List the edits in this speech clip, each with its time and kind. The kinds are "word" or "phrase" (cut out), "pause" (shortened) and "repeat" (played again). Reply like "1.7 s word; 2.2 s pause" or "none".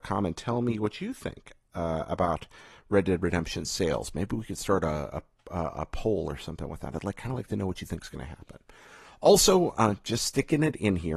none